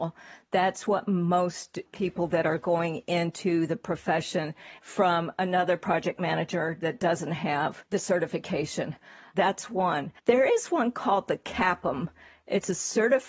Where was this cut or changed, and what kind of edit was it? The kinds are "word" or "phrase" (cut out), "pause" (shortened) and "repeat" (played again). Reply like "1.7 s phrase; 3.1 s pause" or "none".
4.8 s phrase; 7.9 s pause; 10.2 s pause